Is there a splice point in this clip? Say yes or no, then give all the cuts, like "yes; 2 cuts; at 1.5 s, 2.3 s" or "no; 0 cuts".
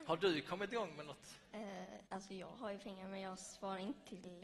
yes; 1 cut; at 2.1 s